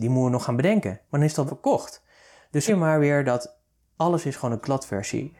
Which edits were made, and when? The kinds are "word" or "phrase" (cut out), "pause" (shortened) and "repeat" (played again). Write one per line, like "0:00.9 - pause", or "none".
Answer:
0:01.5 - word
0:02.7 - word